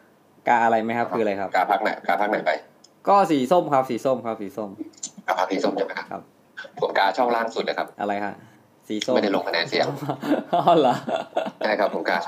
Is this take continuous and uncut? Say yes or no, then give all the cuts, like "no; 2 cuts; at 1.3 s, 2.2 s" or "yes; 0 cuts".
no; 1 cut; at 7.9 s